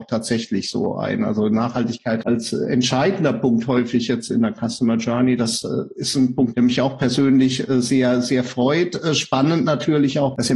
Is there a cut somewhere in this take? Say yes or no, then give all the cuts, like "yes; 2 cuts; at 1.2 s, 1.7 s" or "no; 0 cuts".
no; 0 cuts